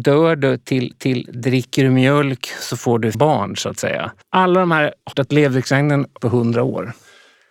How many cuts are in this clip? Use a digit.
5